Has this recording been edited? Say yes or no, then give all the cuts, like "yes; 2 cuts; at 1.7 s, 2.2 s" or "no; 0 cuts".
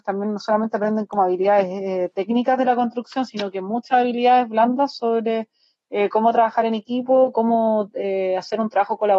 no; 0 cuts